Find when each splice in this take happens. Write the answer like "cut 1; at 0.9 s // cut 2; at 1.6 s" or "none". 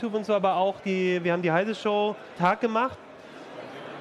cut 1; at 2.4 s

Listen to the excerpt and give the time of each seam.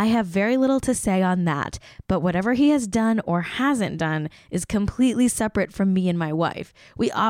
none

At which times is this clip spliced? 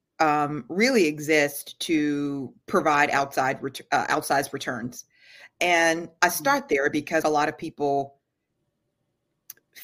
cut 1; at 7.2 s

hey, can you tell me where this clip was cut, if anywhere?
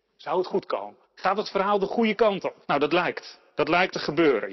cut 1; at 1.0 s // cut 2; at 2.6 s // cut 3; at 3.5 s

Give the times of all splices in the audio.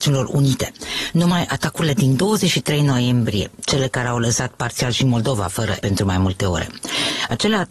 cut 1; at 5.8 s

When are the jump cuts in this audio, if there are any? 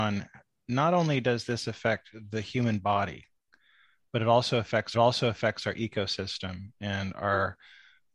cut 1; at 4.9 s

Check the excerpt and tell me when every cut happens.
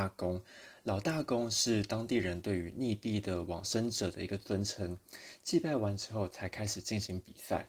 none

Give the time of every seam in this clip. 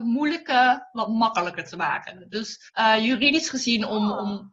cut 1; at 2.7 s

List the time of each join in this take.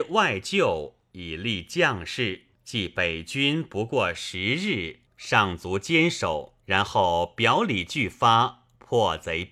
cut 1; at 2.5 s // cut 2; at 5.1 s // cut 3; at 6.6 s

